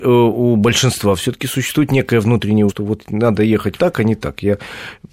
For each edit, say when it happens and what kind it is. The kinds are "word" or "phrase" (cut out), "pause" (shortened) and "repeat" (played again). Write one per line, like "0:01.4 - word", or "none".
0:02.7 - word
0:03.8 - word